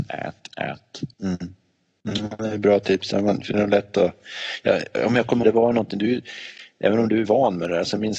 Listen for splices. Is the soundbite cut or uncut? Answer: cut